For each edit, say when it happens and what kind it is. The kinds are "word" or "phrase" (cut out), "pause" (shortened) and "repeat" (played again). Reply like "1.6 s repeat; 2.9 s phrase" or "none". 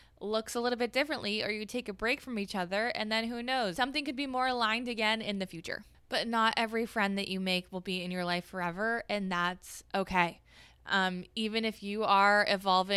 none